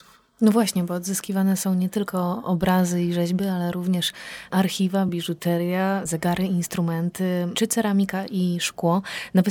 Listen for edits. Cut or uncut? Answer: uncut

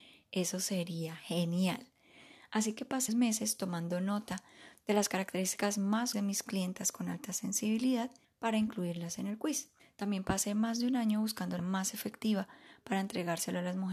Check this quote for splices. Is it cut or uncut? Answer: cut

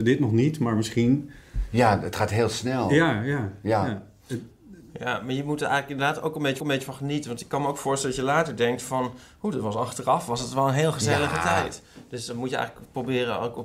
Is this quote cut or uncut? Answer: cut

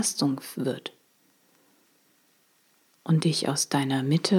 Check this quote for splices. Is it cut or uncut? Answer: uncut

